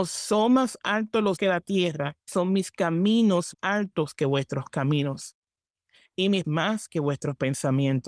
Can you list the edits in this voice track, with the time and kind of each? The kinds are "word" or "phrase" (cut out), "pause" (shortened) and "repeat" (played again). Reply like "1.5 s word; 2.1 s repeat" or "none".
1.4 s word; 2.3 s word; 3.5 s word; 6.4 s word